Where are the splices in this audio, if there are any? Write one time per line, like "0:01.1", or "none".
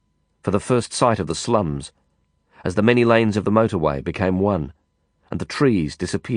none